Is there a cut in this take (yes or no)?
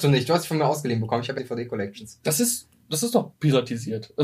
yes